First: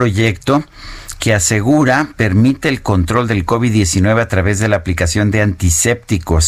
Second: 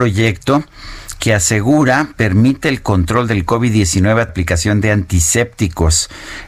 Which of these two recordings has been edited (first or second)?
second